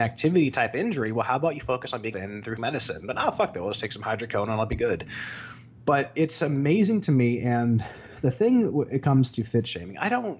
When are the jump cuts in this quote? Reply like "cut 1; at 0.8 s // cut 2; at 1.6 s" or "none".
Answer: cut 1; at 2.1 s // cut 2; at 2.6 s